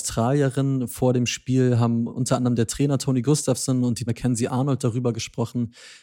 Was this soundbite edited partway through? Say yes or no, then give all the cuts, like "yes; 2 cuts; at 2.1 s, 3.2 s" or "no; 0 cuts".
yes; 1 cut; at 4.1 s